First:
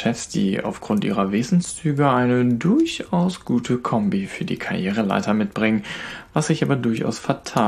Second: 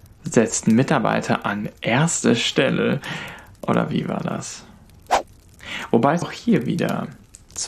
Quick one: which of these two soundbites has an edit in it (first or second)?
second